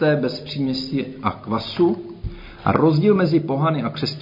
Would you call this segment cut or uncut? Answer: uncut